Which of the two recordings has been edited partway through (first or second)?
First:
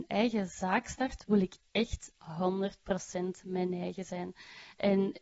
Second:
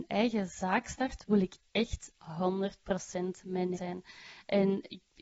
second